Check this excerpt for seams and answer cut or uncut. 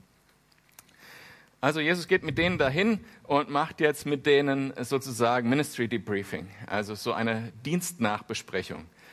uncut